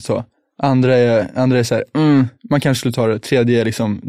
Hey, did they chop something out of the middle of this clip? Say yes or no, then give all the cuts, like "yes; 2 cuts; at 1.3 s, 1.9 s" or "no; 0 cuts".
no; 0 cuts